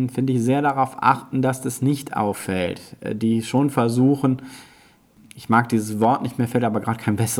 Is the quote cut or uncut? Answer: uncut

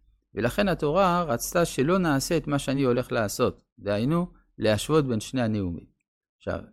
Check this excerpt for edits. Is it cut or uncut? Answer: uncut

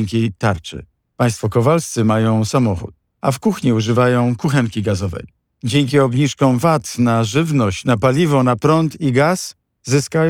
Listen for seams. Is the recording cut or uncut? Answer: uncut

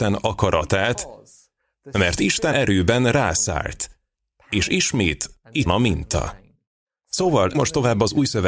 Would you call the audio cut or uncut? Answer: cut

